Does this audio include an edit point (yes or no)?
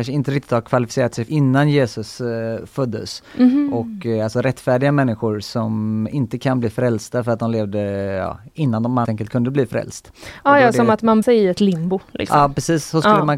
yes